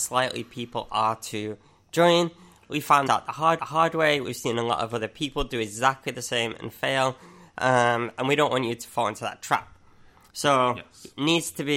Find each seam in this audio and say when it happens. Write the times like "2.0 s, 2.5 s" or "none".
3.1 s, 3.6 s